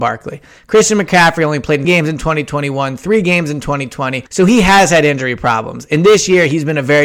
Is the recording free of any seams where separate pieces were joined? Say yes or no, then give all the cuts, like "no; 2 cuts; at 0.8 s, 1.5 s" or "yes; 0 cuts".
no; 2 cuts; at 1.8 s, 4.3 s